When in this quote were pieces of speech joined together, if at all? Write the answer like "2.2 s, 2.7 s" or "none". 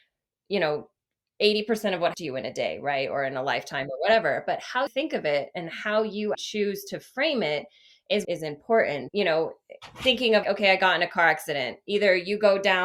2.1 s, 4.9 s, 6.3 s, 8.2 s, 9.1 s, 10.4 s